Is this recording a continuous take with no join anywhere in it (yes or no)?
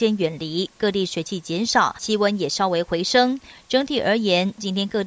yes